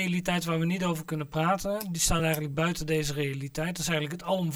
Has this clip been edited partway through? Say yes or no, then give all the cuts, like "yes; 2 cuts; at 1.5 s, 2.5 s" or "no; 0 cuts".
no; 0 cuts